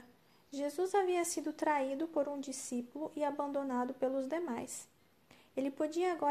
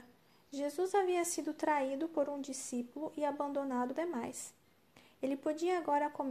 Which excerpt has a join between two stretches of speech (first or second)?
second